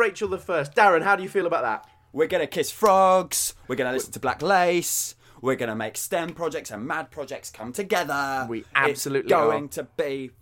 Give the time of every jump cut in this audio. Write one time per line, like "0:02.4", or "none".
none